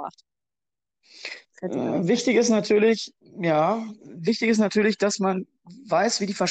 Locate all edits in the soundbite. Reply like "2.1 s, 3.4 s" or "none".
none